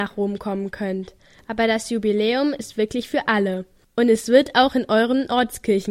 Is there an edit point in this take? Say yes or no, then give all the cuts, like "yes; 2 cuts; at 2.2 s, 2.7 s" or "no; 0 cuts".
no; 0 cuts